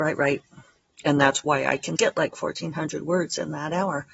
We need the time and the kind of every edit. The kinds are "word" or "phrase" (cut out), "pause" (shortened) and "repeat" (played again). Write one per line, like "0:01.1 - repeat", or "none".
0:02.0 - word